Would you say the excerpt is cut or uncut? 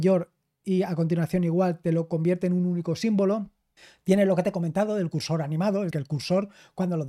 cut